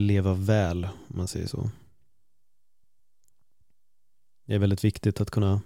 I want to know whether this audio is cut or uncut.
uncut